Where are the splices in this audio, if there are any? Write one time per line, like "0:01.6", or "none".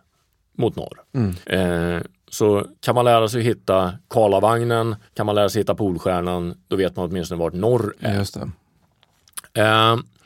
0:01.4
0:02.8
0:05.1